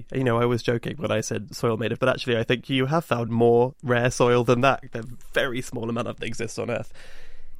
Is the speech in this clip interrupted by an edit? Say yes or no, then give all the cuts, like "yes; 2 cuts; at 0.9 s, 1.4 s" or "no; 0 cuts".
yes; 4 cuts; at 2.0 s, 3.3 s, 5.0 s, 6.2 s